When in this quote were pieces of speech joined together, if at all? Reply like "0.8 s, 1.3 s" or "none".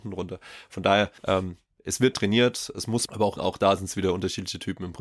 1.2 s, 2.1 s, 3.1 s, 3.4 s